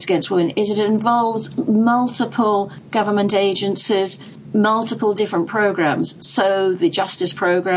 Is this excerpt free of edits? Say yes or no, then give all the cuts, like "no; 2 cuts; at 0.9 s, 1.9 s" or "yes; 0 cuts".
yes; 0 cuts